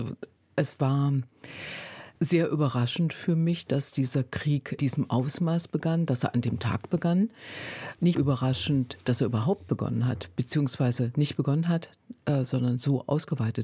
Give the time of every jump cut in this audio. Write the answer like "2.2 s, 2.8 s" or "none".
2.2 s, 4.8 s, 8.1 s

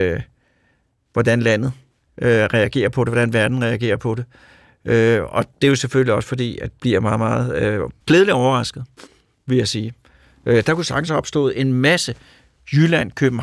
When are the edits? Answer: 6.8 s, 8.0 s, 11.1 s

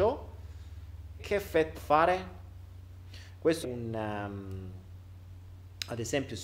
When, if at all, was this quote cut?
1.2 s, 1.7 s, 3.6 s

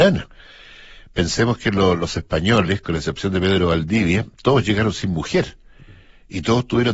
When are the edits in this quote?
none

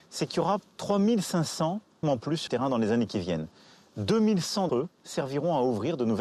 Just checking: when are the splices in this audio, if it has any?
2.0 s, 2.5 s, 4.7 s

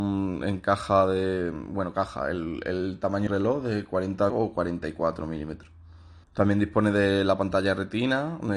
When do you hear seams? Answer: 3.3 s, 4.3 s, 6.2 s

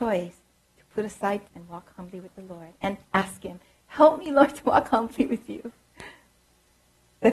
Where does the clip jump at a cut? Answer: 1.5 s

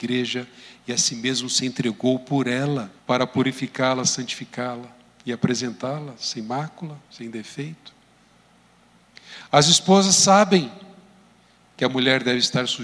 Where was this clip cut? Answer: 3.0 s

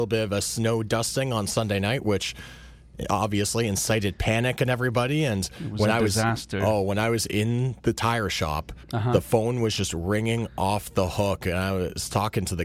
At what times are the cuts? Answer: 7.8 s, 8.8 s

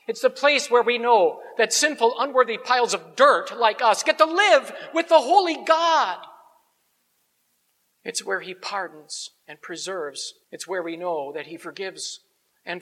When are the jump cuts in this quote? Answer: 10.4 s

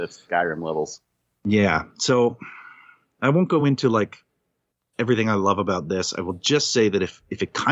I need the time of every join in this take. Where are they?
none

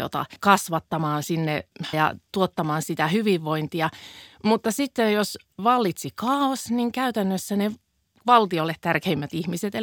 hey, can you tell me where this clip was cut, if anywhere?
1.9 s

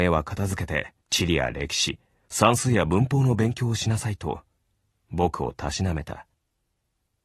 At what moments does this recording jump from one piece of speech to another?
1.0 s

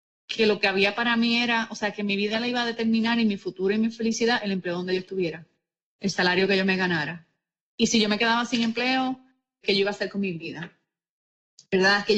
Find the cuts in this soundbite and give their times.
9.6 s

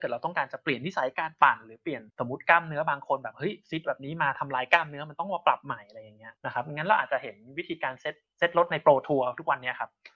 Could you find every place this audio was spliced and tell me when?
2.1 s, 6.4 s

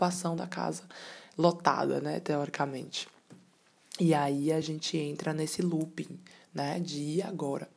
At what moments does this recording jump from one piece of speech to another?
none

